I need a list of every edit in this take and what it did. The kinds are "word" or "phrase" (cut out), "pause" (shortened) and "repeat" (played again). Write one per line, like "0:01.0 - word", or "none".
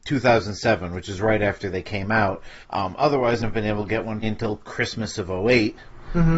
0:02.6 - pause
0:03.4 - phrase
0:04.2 - word